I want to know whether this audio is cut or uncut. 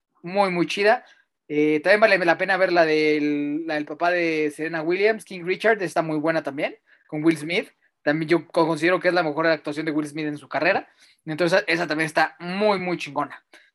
uncut